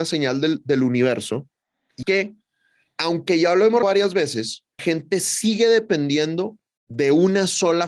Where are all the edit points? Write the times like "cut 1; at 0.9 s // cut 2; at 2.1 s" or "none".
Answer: cut 1; at 2.0 s // cut 2; at 3.8 s // cut 3; at 4.8 s